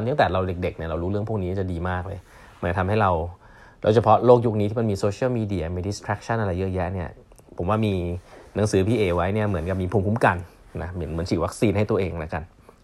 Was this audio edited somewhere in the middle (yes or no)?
no